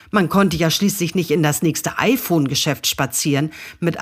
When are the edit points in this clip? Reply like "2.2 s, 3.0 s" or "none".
none